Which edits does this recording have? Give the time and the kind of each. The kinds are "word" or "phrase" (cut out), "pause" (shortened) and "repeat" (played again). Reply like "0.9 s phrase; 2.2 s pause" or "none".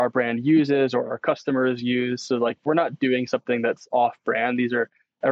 none